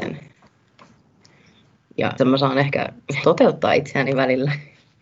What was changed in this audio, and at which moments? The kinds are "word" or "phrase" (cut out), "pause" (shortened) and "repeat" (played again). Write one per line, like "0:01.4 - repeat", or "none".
0:02.2 - word
0:03.2 - word